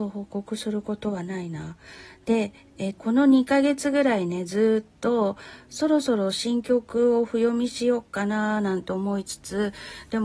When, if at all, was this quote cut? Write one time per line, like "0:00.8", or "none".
0:03.0